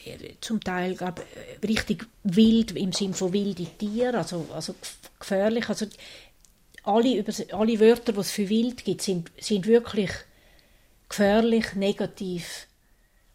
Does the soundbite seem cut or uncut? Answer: uncut